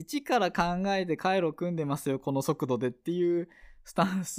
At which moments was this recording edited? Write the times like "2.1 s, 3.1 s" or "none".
none

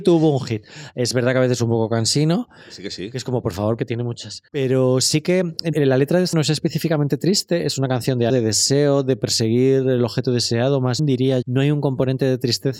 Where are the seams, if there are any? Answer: 3.8 s, 4.5 s, 5.7 s, 6.3 s, 8.3 s, 11.0 s, 11.4 s

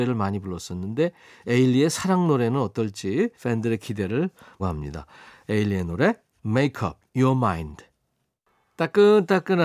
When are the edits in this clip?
3.3 s, 4.6 s

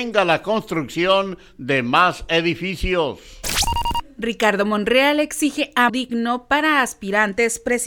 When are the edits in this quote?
4.1 s, 5.9 s

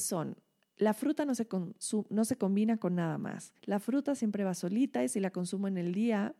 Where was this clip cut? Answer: 3.6 s

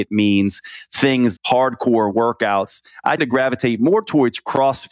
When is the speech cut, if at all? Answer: 1.4 s, 3.2 s

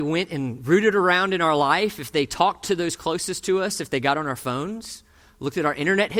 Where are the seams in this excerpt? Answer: none

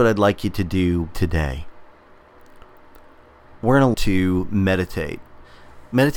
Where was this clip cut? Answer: 1.1 s, 3.9 s

